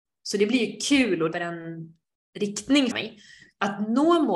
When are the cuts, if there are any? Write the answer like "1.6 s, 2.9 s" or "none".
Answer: 1.3 s, 2.9 s